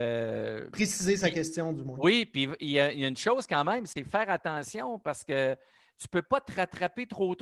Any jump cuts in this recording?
no; 0 cuts

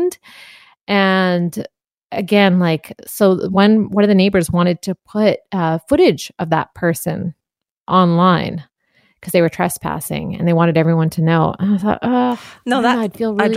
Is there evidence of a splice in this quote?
no; 0 cuts

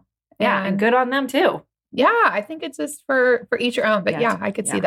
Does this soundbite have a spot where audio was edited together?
no; 0 cuts

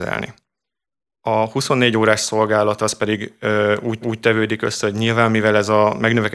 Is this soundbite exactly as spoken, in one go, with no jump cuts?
no; 1 cut; at 4.0 s

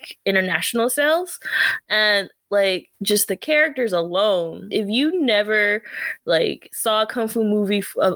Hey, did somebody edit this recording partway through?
yes; 2 cuts; at 2.9 s, 4.7 s

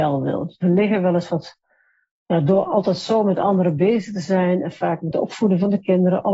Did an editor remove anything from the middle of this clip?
no; 0 cuts

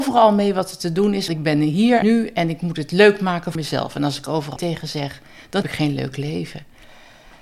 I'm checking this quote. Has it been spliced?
yes; 5 cuts; at 1.3 s, 2.0 s, 3.5 s, 4.6 s, 5.6 s

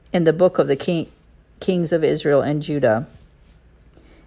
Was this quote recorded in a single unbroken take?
yes; 0 cuts

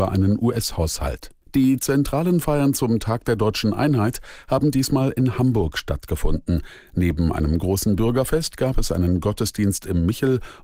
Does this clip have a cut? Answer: yes; 1 cut; at 1.4 s

